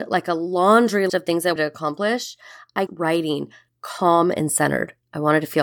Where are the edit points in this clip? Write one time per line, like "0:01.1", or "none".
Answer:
0:01.1
0:01.6
0:02.9